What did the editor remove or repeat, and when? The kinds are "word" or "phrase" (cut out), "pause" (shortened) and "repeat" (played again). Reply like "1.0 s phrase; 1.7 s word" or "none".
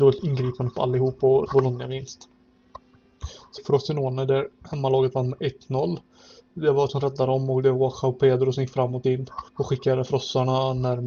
1.5 s word; 3.6 s phrase; 6.9 s word; 9.0 s word; 9.5 s pause